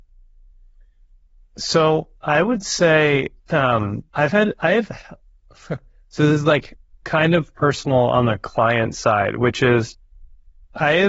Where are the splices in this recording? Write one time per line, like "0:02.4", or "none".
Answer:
0:02.2
0:04.1